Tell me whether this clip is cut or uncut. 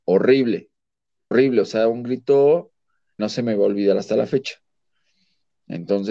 cut